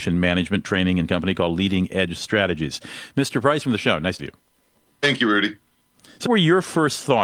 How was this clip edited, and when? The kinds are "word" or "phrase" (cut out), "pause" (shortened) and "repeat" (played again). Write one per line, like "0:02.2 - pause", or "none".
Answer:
0:01.1 - word
0:03.6 - word
0:04.2 - word
0:06.2 - word

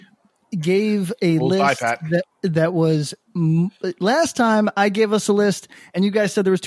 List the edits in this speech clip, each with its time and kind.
0:02.3 - pause

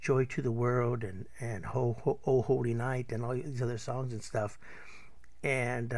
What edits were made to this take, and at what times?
none

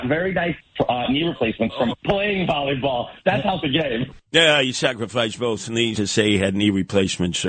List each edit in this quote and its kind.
0:03.6 - phrase
0:04.3 - pause
0:05.9 - phrase

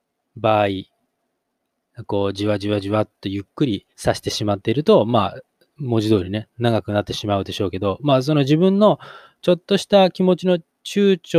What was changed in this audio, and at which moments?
0:03.9 - pause

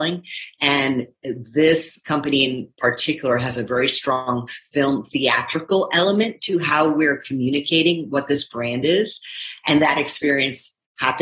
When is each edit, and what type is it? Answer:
none

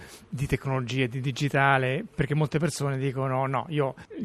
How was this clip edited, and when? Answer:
none

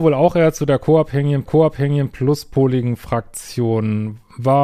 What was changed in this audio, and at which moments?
0:01.5 - repeat

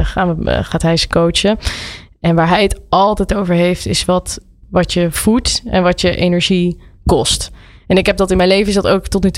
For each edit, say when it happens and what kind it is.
none

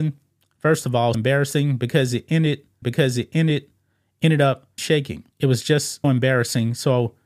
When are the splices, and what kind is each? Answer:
0:01.1 - word
0:02.8 - repeat
0:04.8 - phrase
0:05.3 - pause
0:06.0 - word

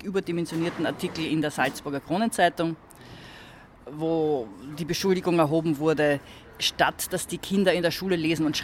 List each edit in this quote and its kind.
none

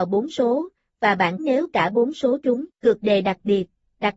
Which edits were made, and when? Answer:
0:01.4 - word
0:02.7 - pause

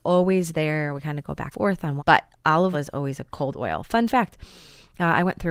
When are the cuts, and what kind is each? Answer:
0:01.5 - word
0:02.0 - phrase
0:02.7 - word

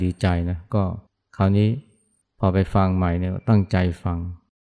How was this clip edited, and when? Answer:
0:01.1 - pause
0:02.2 - pause

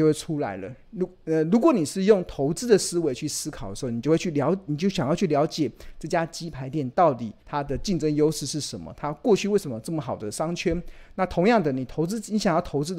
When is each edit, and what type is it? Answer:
0:07.4 - pause

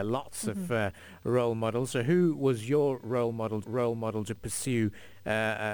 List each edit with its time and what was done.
0:03.6 - repeat

